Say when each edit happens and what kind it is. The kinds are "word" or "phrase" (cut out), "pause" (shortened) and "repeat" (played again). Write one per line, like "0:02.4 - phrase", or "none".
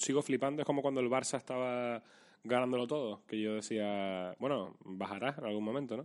none